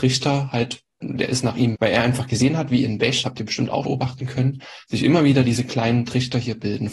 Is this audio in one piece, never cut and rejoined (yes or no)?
no